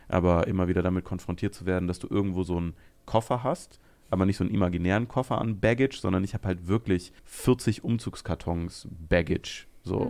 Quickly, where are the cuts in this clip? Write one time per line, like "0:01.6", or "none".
0:07.2